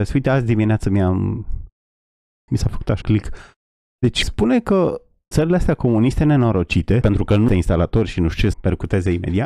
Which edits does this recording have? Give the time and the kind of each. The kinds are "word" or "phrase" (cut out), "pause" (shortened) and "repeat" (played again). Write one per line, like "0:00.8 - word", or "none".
0:02.5 - word
0:03.0 - word
0:04.2 - word
0:05.3 - word
0:07.0 - word
0:07.5 - word
0:08.5 - word